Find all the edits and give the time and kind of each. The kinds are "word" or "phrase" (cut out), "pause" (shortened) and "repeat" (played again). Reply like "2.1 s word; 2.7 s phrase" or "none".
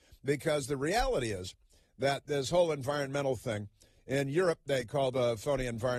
none